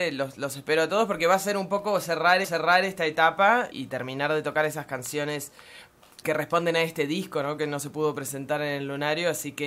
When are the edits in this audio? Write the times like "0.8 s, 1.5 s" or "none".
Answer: 2.4 s, 3.7 s, 6.2 s